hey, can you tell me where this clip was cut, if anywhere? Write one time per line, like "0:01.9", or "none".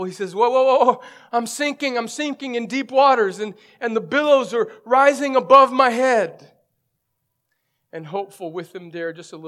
none

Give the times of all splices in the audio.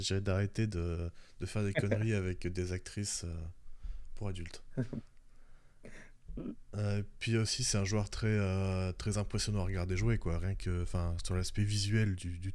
none

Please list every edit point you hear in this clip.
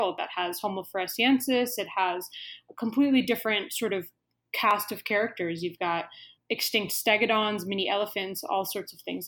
none

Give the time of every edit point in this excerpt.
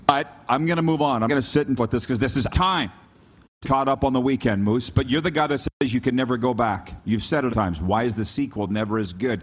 0:01.3
0:01.8
0:02.5
0:03.6
0:07.5

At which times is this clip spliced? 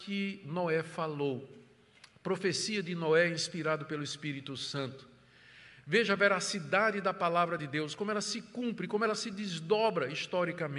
none

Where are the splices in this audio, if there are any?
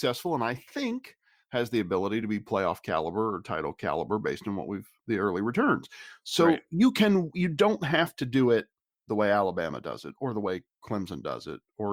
none

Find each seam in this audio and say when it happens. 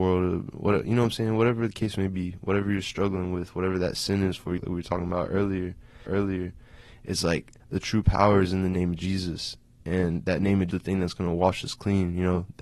0:04.6
0:06.1
0:07.6
0:10.7

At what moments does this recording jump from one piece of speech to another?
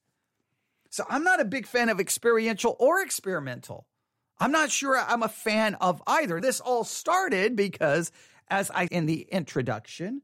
0:06.4
0:08.9

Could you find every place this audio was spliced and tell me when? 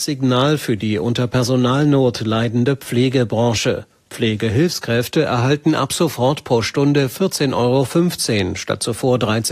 none

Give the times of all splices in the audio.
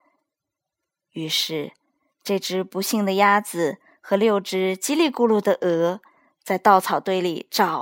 none

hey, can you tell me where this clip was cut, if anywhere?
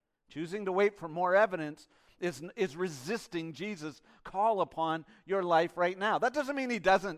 none

